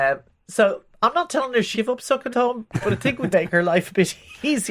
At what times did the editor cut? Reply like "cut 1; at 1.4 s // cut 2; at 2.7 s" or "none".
cut 1; at 1.7 s // cut 2; at 2.3 s // cut 3; at 3.3 s